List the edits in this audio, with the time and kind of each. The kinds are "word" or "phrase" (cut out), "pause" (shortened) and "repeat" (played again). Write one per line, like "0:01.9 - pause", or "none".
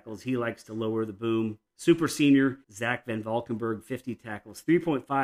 0:01.7 - pause
0:02.6 - pause